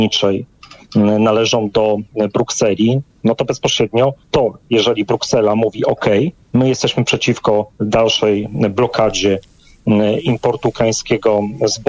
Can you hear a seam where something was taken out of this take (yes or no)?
yes